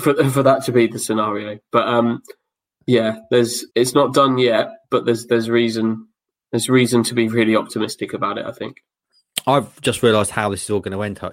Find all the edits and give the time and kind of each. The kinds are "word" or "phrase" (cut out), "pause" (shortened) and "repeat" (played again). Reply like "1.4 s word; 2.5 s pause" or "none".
3.7 s pause; 4.8 s pause